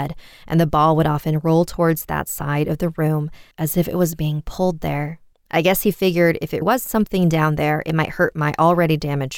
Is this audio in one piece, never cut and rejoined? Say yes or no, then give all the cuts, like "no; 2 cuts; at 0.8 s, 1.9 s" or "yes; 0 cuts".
no; 3 cuts; at 3.5 s, 5.3 s, 6.6 s